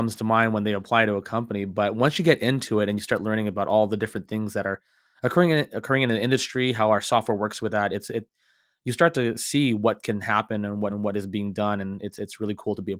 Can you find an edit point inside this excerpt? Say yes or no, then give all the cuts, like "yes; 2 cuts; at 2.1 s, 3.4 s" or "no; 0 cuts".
yes; 1 cut; at 10.9 s